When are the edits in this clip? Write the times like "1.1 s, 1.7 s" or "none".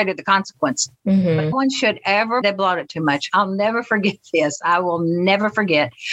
1.5 s, 2.4 s

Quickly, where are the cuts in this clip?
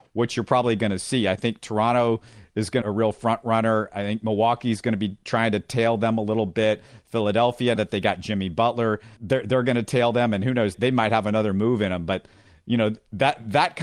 2.8 s, 7.8 s, 9.2 s, 10.7 s

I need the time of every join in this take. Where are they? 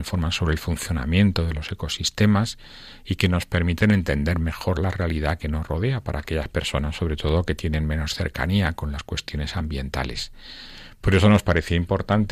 none

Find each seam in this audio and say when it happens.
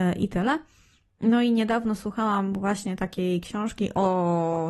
none

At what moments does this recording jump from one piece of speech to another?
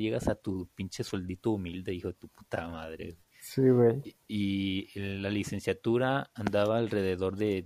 4.2 s

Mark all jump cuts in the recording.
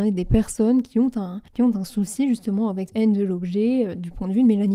1.5 s, 2.9 s

